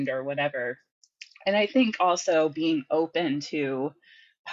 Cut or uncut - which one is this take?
uncut